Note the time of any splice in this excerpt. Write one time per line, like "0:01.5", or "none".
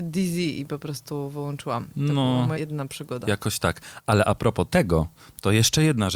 0:02.5